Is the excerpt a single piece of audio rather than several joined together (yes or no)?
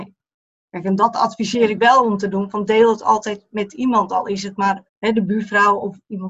no